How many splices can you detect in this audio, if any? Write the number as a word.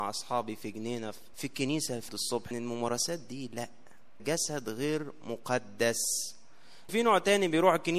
five